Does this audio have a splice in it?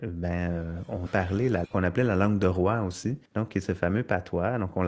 yes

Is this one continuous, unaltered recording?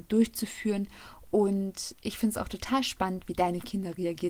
yes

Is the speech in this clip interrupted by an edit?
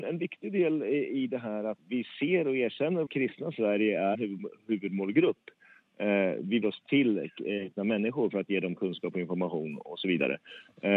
yes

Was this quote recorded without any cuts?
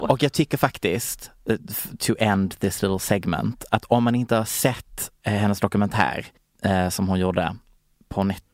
no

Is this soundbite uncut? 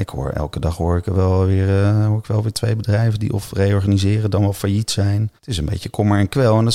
no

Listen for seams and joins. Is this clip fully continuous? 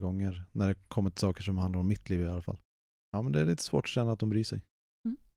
yes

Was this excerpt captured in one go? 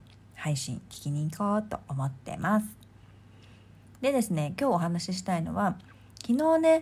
yes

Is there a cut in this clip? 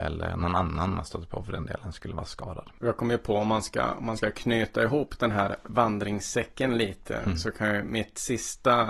no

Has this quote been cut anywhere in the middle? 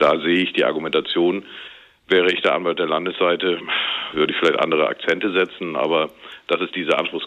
no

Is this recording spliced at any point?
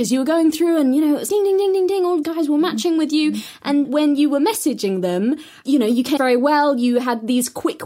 yes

